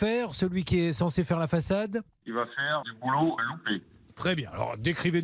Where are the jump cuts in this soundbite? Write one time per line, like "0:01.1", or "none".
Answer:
0:02.8
0:03.4